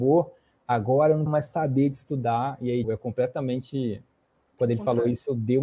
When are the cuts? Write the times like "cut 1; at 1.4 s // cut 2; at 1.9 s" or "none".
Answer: cut 1; at 1.3 s // cut 2; at 2.8 s